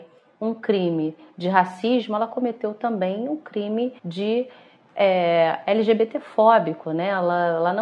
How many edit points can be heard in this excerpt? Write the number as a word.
one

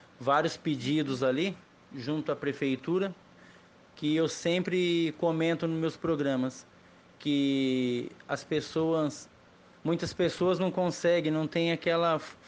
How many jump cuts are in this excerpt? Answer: zero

